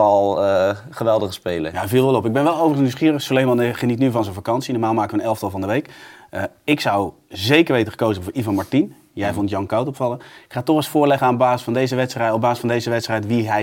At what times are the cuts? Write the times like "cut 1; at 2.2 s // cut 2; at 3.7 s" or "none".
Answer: none